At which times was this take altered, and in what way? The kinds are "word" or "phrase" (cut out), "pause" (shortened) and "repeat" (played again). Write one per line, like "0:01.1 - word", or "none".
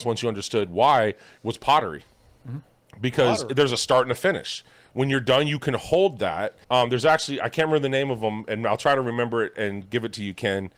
0:06.6 - pause